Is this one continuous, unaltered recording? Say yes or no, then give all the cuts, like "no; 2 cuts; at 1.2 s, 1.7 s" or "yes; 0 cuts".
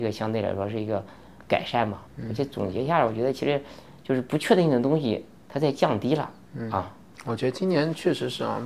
no; 2 cuts; at 2.1 s, 5.4 s